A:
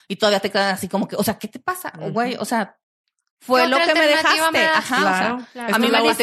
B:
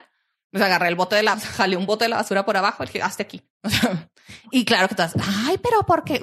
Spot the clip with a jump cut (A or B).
B